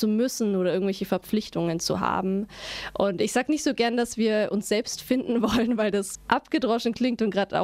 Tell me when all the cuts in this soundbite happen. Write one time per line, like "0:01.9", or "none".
0:06.1

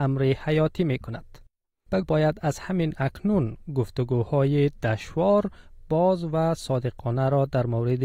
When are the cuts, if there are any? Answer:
0:02.0

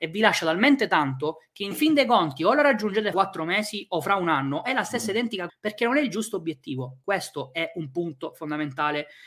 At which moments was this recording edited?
0:03.1
0:05.5

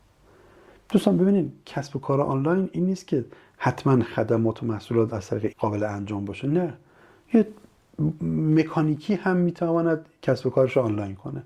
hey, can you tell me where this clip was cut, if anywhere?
0:04.1
0:05.5

